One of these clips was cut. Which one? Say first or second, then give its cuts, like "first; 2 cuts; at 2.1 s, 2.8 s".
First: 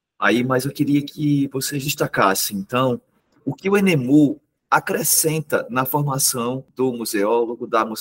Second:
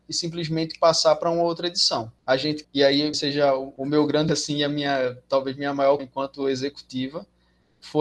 second; 4 cuts; at 2.6 s, 3.1 s, 4.3 s, 6.0 s